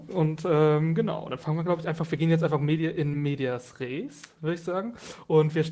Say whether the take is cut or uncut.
uncut